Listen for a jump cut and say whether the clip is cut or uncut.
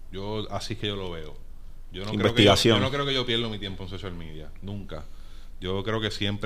uncut